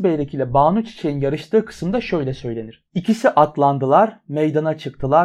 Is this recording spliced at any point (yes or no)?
yes